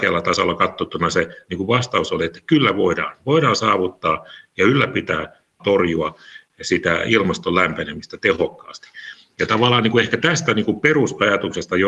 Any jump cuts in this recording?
yes; 1 cut; at 5.6 s

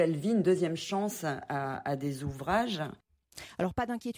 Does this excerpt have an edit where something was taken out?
no; 0 cuts

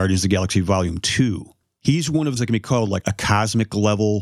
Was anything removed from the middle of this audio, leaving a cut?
yes; 2 cuts; at 2.4 s, 3.0 s

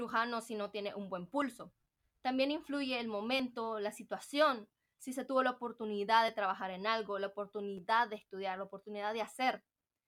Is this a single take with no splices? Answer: yes; 0 cuts

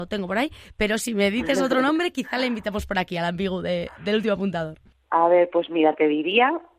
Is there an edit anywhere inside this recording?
no; 0 cuts

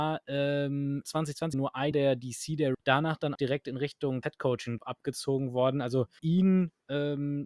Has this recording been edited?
yes; 8 cuts; at 1.0 s, 1.5 s, 1.9 s, 2.7 s, 3.3 s, 4.2 s, 4.8 s, 6.2 s

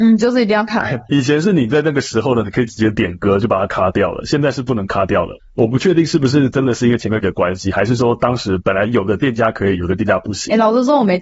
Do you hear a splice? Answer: yes; 2 cuts; at 1.1 s, 7.2 s

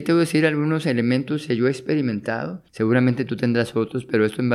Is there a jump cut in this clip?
yes; 1 cut; at 2.7 s

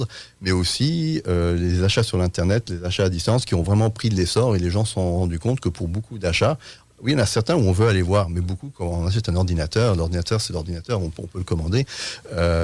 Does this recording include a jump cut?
no; 0 cuts

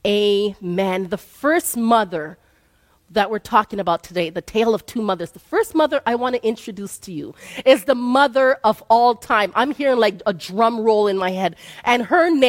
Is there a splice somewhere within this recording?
no; 0 cuts

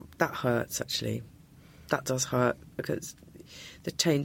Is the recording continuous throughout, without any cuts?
yes; 0 cuts

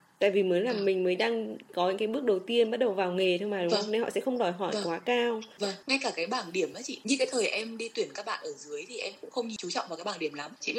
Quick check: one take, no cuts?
yes; 0 cuts

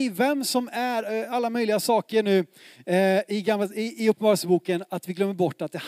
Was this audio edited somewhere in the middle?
no; 0 cuts

